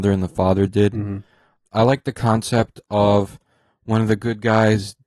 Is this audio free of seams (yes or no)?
yes